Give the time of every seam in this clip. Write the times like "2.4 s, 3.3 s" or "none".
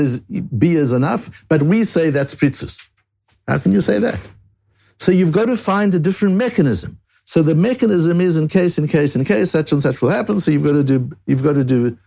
none